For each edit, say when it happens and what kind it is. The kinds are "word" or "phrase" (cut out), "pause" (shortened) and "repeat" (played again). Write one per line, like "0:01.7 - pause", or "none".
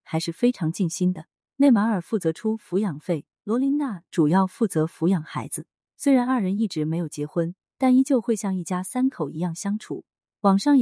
none